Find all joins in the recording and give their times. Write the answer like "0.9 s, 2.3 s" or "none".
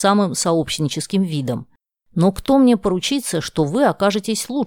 none

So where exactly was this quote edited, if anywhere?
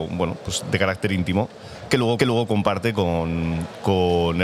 2.2 s

